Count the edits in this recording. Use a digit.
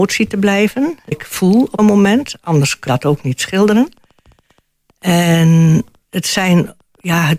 4